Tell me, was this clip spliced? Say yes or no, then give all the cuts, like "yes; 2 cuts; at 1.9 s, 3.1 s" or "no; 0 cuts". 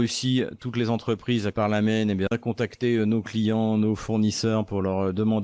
yes; 2 cuts; at 1.5 s, 2.3 s